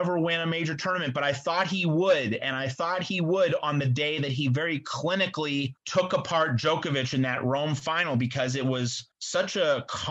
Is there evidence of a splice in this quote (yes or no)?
yes